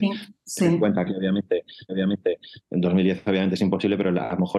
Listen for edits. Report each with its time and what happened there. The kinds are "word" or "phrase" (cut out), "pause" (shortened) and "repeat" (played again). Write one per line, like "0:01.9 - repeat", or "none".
0:01.9 - repeat